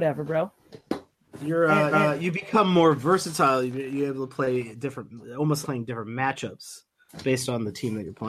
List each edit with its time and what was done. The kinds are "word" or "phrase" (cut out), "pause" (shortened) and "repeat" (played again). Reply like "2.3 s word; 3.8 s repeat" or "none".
1.9 s repeat; 5.6 s word